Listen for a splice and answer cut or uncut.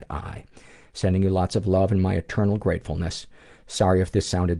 uncut